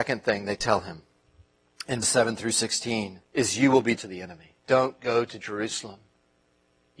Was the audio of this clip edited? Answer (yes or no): yes